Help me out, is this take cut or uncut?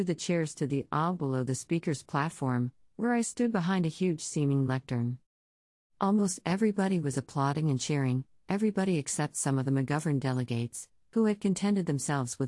uncut